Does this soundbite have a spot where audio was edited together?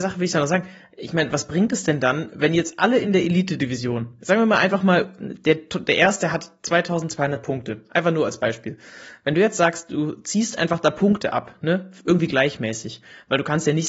no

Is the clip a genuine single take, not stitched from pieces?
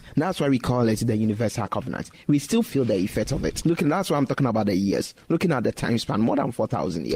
yes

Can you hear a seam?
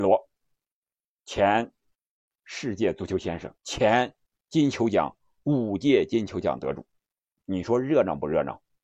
yes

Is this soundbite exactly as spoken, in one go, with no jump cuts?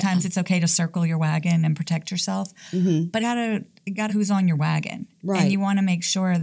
no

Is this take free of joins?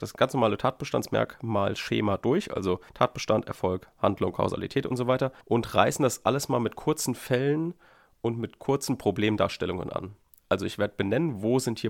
no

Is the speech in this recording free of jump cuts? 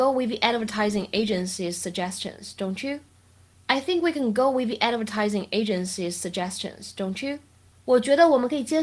yes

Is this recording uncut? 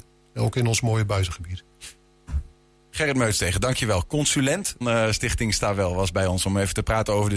no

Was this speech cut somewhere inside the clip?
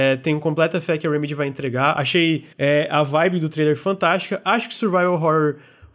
yes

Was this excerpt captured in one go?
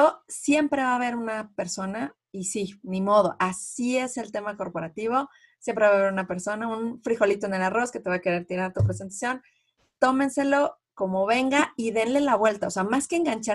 yes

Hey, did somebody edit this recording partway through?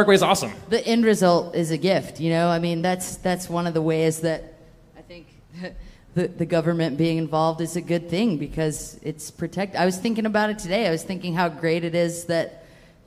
no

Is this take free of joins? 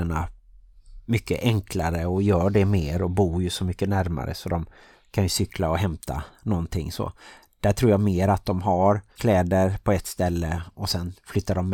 no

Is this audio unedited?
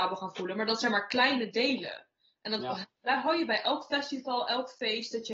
yes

